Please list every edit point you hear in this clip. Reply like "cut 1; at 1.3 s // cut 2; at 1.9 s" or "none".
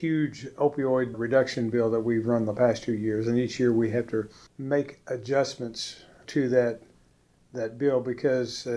cut 1; at 1.1 s // cut 2; at 4.5 s // cut 3; at 6.2 s

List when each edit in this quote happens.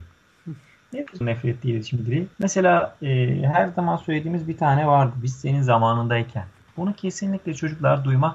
cut 1; at 1.2 s // cut 2; at 2.3 s // cut 3; at 6.7 s

